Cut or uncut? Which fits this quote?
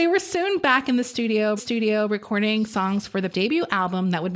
cut